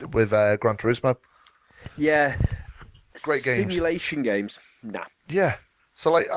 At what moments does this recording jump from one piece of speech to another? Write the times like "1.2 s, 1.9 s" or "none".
3.1 s